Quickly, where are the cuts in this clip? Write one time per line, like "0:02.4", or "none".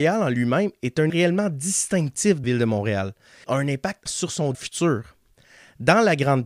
0:01.1
0:02.4
0:03.4
0:04.1
0:04.5